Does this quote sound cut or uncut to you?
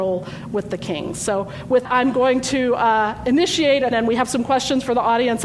cut